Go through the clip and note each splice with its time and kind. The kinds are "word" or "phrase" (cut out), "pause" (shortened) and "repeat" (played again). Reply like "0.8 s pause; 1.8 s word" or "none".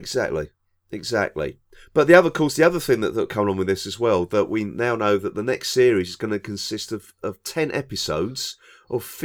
none